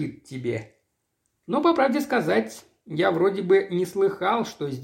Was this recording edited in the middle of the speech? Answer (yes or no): no